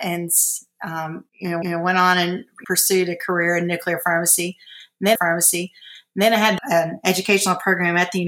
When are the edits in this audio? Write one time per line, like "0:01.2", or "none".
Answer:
0:01.3
0:01.6
0:02.6
0:05.2
0:06.6